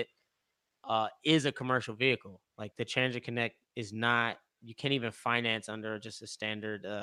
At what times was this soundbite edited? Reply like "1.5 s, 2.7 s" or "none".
2.7 s